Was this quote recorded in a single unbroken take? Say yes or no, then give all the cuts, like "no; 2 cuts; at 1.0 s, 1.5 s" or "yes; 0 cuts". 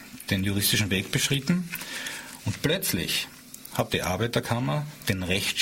yes; 0 cuts